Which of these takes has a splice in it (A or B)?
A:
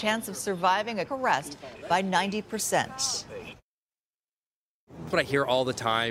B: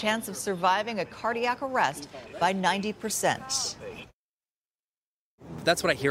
A